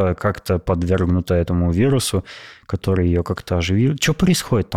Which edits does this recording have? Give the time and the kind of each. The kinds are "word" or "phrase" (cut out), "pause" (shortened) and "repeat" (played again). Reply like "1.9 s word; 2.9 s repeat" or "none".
none